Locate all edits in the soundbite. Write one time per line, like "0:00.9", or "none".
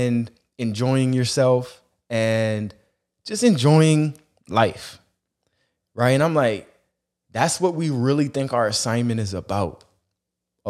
none